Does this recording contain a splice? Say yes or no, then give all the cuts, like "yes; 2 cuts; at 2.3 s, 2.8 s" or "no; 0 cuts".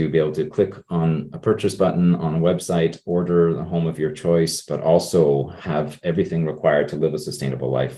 no; 0 cuts